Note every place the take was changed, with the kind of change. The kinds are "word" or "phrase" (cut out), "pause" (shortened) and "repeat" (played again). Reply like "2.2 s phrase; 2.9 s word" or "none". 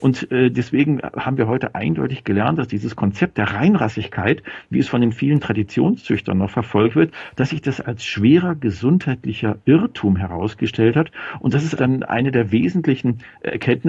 11.8 s word